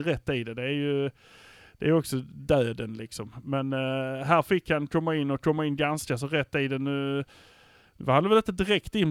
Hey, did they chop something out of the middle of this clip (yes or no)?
no